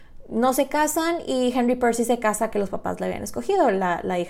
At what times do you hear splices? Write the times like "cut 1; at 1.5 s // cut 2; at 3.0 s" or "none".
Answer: cut 1; at 2.5 s